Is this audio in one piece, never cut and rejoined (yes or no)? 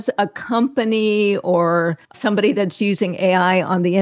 no